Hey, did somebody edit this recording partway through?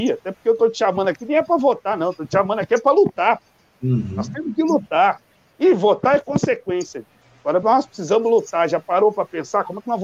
no; 0 cuts

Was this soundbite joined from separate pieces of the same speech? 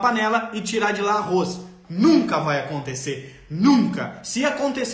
no; 0 cuts

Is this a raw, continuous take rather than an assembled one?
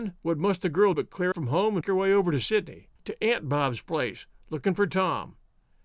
no; 4 cuts; at 0.9 s, 1.3 s, 1.8 s, 3.0 s

